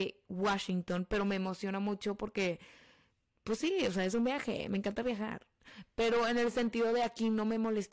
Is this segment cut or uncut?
uncut